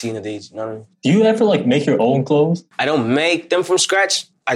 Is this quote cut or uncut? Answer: cut